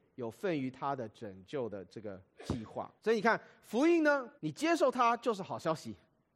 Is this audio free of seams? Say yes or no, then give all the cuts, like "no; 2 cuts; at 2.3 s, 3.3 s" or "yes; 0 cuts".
no; 2 cuts; at 3.0 s, 4.4 s